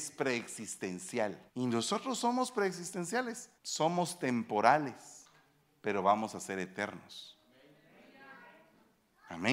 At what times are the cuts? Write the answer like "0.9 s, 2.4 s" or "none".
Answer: 1.5 s, 3.6 s, 5.7 s